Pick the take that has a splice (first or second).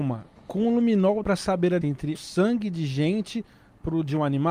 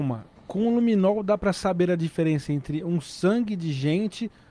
first